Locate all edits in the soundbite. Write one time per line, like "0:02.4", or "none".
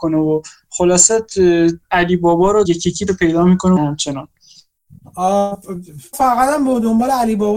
0:01.8
0:02.6
0:03.1
0:03.8
0:06.1